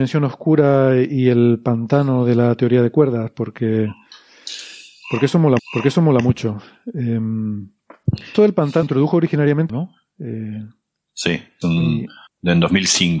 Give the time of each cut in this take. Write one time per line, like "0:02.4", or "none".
0:05.6
0:08.3
0:08.8
0:09.7
0:11.6
0:12.3